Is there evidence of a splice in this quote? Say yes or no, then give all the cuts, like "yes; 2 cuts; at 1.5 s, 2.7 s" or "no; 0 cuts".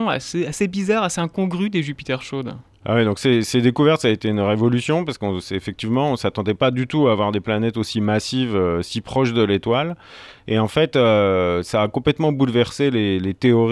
no; 0 cuts